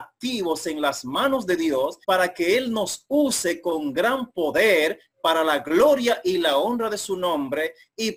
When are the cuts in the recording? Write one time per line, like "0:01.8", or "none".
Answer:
0:02.0